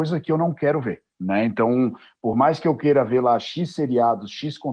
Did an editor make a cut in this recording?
no; 0 cuts

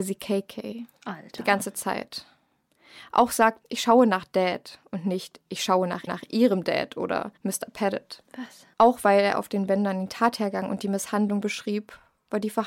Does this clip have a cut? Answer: yes; 5 cuts; at 3.6 s, 6.1 s, 7.4 s, 8.7 s, 11.4 s

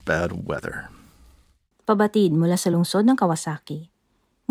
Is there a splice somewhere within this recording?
no; 0 cuts

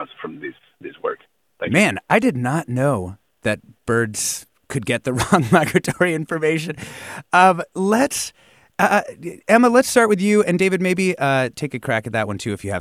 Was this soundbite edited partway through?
no; 0 cuts

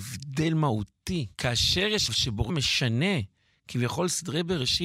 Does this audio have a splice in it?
yes; 3 cuts; at 1.3 s, 2.1 s, 2.5 s

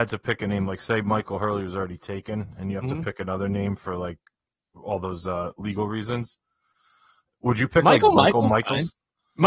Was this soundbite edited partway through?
no; 0 cuts

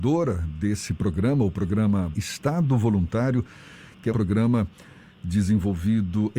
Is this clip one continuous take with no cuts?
no; 2 cuts; at 2.1 s, 4.1 s

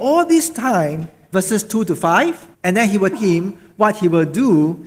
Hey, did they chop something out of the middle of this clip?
yes; 3 cuts; at 1.3 s, 2.5 s, 3.1 s

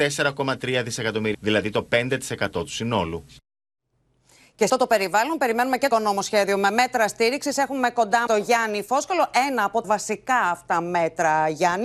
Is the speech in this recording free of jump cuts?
no; 5 cuts; at 1.3 s, 4.7 s, 5.9 s, 8.3 s, 9.8 s

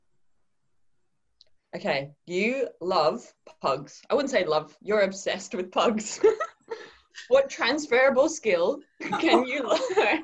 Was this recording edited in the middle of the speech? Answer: yes; 3 cuts; at 2.2 s, 3.4 s, 6.6 s

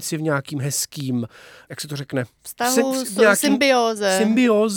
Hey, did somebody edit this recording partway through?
no; 0 cuts

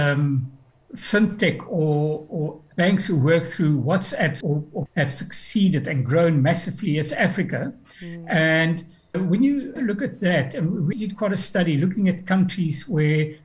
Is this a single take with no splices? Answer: no; 7 cuts; at 2.3 s, 2.7 s, 4.4 s, 4.9 s, 9.1 s, 9.8 s, 10.9 s

